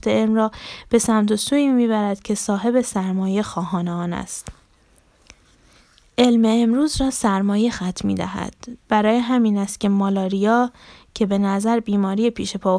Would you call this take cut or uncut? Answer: uncut